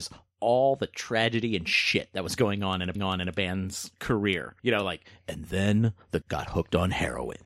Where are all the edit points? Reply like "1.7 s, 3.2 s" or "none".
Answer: 3.0 s, 4.6 s, 6.2 s